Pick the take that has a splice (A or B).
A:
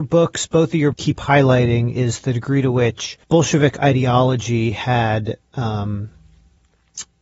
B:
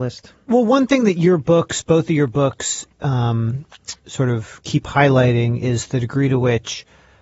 A